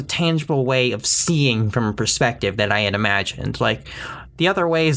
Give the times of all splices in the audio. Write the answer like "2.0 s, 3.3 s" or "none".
none